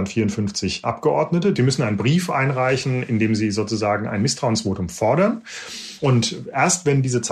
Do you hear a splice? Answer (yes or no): no